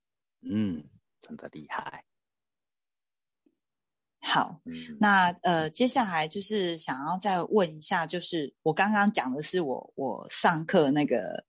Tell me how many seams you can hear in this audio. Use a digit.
1